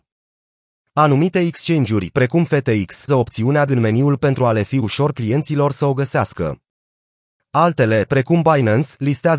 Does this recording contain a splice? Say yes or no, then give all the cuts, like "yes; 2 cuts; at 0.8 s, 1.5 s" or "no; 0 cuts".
yes; 3 cuts; at 3.1 s, 3.7 s, 4.2 s